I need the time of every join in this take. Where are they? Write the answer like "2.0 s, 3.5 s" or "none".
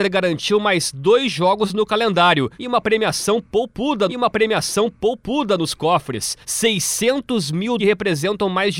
2.5 s, 4.1 s, 6.4 s, 7.8 s